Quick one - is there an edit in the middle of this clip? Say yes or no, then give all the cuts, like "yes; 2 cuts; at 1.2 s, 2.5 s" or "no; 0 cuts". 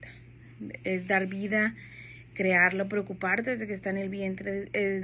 no; 0 cuts